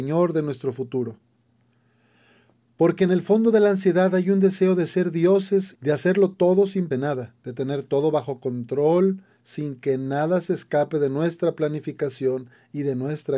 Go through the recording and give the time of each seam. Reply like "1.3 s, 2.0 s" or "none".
5.7 s, 6.3 s, 6.9 s, 7.4 s